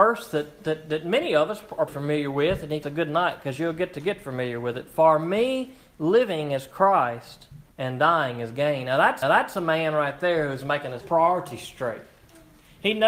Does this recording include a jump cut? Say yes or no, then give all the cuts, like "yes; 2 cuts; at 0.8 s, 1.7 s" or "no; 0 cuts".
yes; 5 cuts; at 1.9 s, 2.8 s, 7.7 s, 9.2 s, 11.0 s